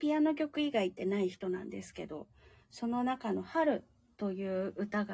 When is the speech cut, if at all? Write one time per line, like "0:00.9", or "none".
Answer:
none